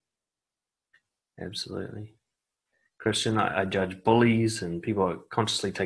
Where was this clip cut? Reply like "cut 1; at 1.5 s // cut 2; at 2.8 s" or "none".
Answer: none